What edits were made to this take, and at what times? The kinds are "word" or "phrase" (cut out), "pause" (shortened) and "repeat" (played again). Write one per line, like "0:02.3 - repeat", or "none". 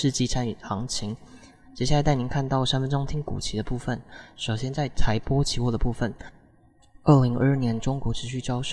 none

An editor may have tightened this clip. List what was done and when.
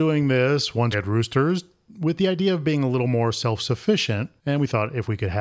0:00.9 - word
0:04.4 - pause

